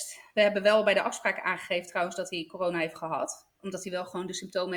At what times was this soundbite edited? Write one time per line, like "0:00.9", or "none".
0:03.5